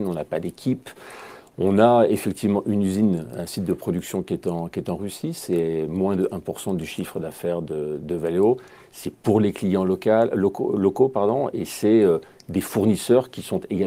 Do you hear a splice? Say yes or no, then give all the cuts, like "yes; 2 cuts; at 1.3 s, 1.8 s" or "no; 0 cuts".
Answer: no; 0 cuts